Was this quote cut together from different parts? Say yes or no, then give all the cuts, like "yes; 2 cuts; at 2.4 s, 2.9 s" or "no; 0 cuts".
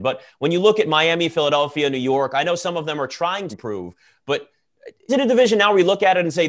yes; 2 cuts; at 3.5 s, 5.1 s